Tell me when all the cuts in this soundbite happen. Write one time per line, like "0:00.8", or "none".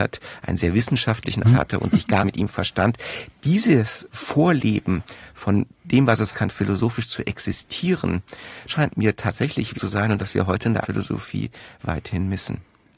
0:01.4
0:02.2
0:06.3
0:08.7
0:09.7
0:10.2
0:10.8

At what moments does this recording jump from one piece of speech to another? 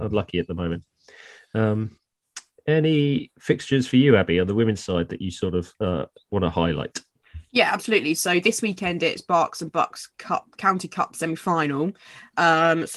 none

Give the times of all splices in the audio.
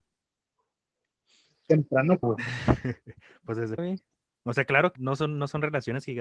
0:02.2
0:03.8
0:05.0

